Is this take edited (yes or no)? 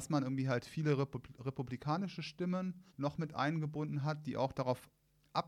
yes